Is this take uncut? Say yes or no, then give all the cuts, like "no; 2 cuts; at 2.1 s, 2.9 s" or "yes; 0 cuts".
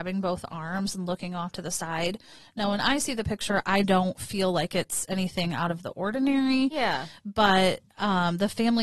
yes; 0 cuts